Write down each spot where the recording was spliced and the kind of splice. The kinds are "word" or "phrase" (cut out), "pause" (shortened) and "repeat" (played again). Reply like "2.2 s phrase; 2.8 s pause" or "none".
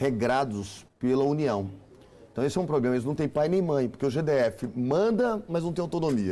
none